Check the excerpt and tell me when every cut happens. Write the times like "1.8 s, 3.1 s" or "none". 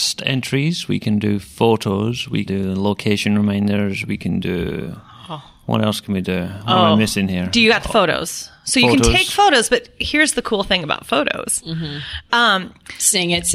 2.5 s